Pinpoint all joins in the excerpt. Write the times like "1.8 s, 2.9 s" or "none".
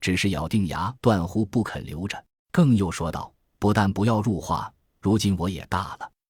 1.0 s, 2.3 s, 3.3 s